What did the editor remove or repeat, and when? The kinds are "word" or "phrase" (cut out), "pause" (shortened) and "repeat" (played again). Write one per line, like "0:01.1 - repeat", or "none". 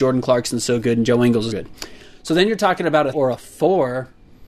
0:01.5 - word
0:03.1 - word